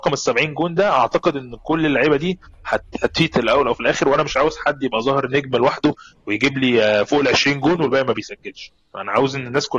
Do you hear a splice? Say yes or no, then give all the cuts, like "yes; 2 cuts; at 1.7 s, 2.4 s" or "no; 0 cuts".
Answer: no; 0 cuts